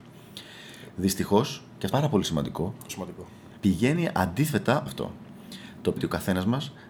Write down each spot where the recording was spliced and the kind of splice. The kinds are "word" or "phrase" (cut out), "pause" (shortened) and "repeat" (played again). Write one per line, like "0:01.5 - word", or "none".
0:01.9 - word
0:02.9 - word
0:03.6 - pause
0:04.9 - phrase
0:06.0 - word